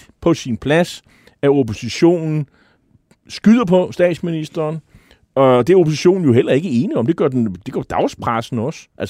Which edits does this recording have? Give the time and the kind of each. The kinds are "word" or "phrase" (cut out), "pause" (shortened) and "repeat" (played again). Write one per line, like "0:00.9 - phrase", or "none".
none